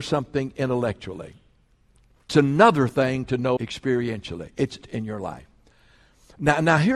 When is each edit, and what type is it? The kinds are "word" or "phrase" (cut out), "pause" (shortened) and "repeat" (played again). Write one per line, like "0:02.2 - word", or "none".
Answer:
0:02.3 - word
0:03.6 - word
0:04.8 - word